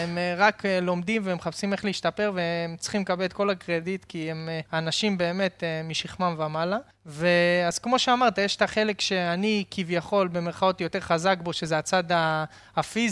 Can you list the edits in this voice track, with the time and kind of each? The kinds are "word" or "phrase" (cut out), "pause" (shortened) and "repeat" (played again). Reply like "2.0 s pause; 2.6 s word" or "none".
4.7 s pause; 6.9 s pause